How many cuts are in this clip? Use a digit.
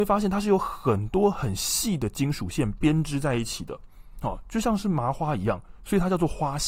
0